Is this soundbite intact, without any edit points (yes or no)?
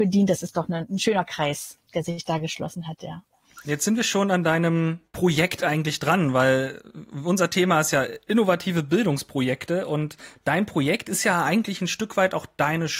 yes